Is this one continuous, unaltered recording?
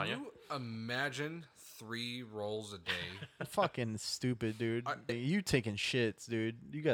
no; 1 cut; at 5.1 s

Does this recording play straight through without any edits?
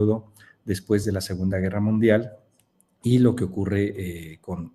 yes; 0 cuts

